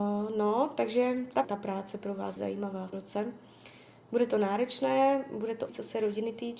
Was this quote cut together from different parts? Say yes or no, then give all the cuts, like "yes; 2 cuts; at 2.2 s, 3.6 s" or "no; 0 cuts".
yes; 4 cuts; at 1.4 s, 2.4 s, 2.9 s, 5.7 s